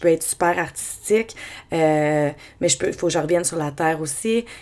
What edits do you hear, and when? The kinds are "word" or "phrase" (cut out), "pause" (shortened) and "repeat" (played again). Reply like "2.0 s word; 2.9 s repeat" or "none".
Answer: none